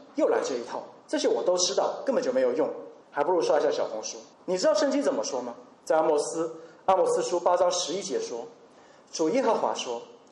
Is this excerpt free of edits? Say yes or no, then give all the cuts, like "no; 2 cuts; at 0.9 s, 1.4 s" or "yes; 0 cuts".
no; 4 cuts; at 1.0 s, 3.0 s, 4.3 s, 5.7 s